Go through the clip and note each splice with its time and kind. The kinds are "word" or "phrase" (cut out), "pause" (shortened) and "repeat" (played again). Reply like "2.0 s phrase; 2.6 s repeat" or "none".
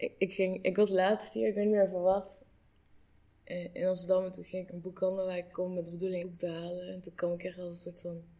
4.7 s phrase; 5.5 s word; 6.2 s word